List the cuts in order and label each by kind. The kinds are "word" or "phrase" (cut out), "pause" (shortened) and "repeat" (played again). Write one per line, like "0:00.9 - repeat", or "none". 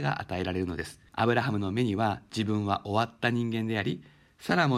0:01.1 - pause